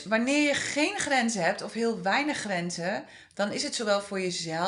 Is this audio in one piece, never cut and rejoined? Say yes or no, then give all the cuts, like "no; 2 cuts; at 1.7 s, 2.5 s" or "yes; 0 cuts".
yes; 0 cuts